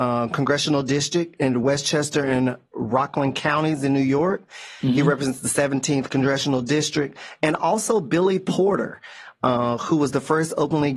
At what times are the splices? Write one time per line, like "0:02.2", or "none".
none